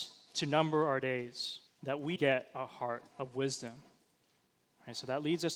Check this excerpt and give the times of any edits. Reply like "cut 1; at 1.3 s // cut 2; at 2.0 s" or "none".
cut 1; at 1.7 s // cut 2; at 2.2 s // cut 3; at 3.1 s